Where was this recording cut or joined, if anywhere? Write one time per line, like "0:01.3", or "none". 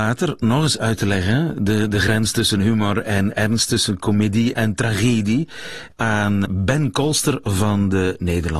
0:06.4